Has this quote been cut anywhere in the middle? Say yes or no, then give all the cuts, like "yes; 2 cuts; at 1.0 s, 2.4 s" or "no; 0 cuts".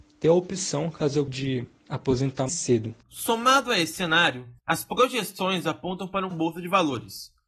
yes; 5 cuts; at 1.3 s, 2.5 s, 3.0 s, 4.6 s, 6.3 s